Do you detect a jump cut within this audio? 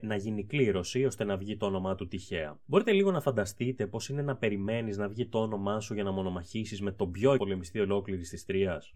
yes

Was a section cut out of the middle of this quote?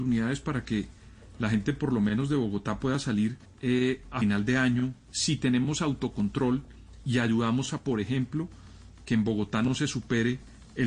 yes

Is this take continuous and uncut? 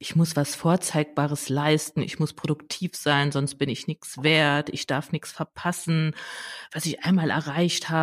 yes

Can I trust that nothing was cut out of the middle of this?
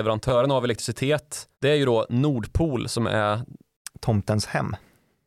no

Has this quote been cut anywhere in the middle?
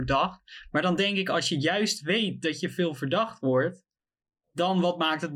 no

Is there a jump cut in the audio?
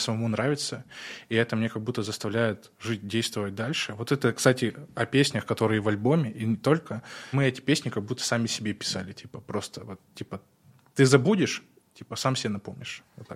no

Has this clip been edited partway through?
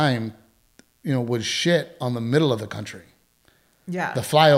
no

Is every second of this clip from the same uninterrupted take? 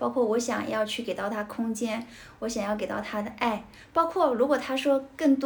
yes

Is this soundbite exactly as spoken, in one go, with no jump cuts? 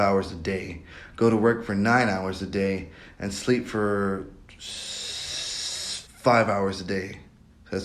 no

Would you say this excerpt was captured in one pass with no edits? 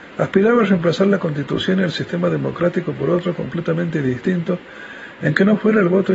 yes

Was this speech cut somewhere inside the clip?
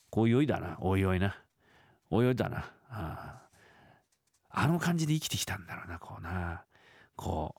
no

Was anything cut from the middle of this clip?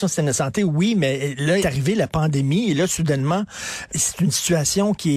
yes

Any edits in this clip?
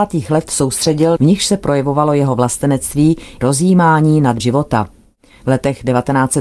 yes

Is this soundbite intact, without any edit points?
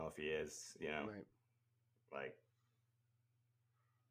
yes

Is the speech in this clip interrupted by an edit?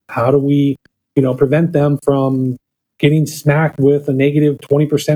no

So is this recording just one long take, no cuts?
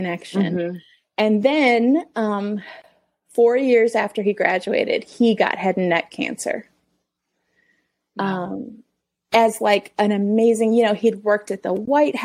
yes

